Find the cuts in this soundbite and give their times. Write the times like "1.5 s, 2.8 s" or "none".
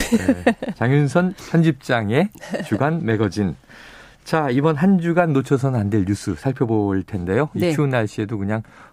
none